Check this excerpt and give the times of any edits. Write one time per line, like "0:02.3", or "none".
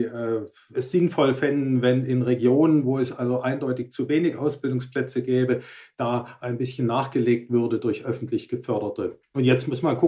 none